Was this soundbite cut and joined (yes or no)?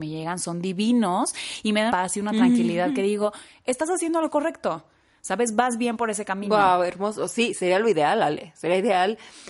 yes